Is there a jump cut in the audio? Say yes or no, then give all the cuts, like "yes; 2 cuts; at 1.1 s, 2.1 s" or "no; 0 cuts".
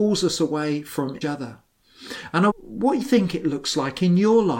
yes; 3 cuts; at 1.2 s, 2.5 s, 3.0 s